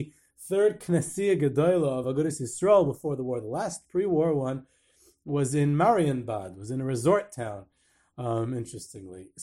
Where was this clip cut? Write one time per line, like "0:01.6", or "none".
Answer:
none